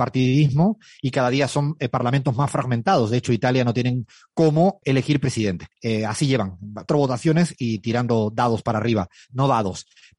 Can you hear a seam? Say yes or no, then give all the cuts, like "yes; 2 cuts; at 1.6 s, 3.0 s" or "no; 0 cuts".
yes; 3 cuts; at 4.8 s, 5.7 s, 6.9 s